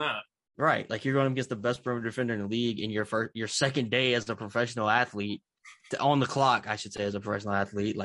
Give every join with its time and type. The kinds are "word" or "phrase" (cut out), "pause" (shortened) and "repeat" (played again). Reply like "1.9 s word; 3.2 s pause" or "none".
none